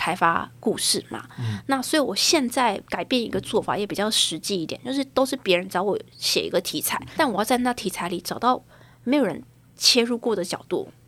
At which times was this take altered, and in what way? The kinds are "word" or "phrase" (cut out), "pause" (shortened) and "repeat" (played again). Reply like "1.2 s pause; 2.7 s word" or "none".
7.2 s word